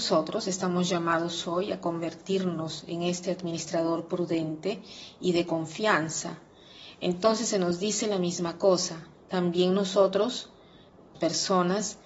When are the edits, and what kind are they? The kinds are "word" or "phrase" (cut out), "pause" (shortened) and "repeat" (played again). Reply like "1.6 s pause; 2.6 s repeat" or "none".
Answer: 9.1 s pause; 11.1 s word